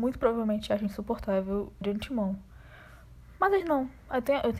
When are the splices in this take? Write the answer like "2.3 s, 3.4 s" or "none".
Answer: 1.8 s, 3.6 s